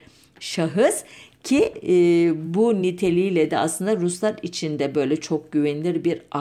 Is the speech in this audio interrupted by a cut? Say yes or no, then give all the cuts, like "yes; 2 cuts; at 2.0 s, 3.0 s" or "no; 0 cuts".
no; 0 cuts